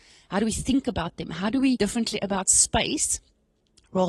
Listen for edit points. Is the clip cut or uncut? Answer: cut